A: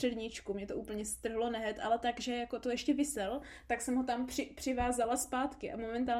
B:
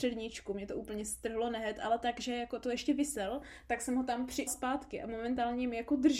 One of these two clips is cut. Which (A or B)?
B